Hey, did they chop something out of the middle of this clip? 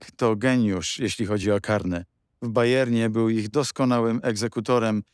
no; 0 cuts

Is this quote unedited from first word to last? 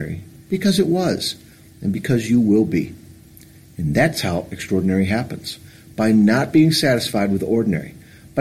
yes; 0 cuts

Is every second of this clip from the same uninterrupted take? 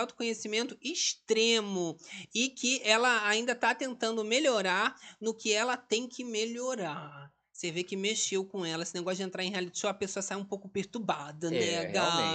yes; 0 cuts

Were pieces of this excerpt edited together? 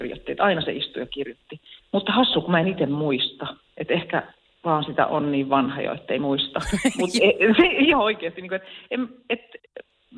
no; 0 cuts

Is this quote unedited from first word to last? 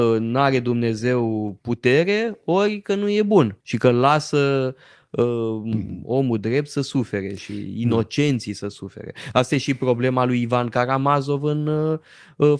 no; 1 cut; at 3.6 s

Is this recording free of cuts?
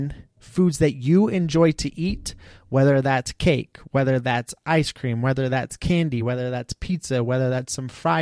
yes; 0 cuts

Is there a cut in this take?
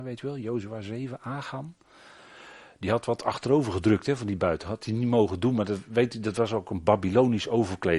no; 0 cuts

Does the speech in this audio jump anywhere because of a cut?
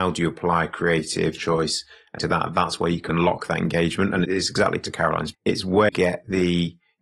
yes; 6 cuts; at 1.4 s, 2.2 s, 3.1 s, 4.2 s, 5.3 s, 5.9 s

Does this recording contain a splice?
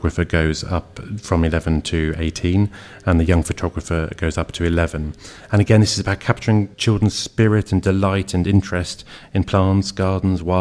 yes; 1 cut; at 6.7 s

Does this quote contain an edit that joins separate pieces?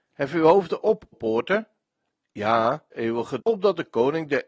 yes; 3 cuts; at 1.1 s, 2.9 s, 3.4 s

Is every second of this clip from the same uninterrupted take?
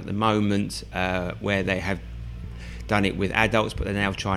yes; 0 cuts

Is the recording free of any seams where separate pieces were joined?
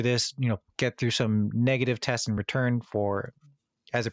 yes; 0 cuts

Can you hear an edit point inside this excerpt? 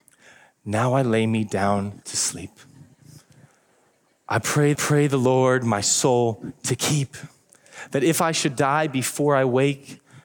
yes; 1 cut; at 4.7 s

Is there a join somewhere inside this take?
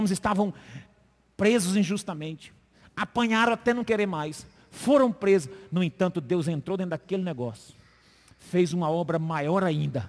no; 0 cuts

